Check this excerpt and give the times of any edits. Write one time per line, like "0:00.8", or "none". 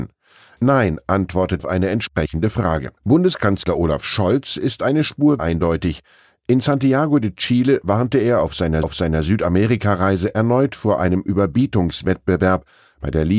0:01.6
0:03.0
0:05.4
0:08.8

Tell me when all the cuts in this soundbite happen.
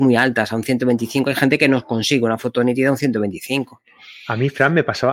none

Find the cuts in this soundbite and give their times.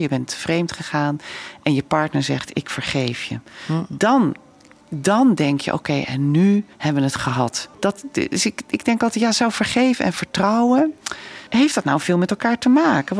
0:06.7
0:07.7
0:11.5

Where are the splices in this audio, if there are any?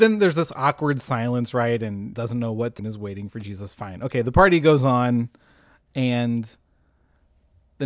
0:02.1
0:02.8

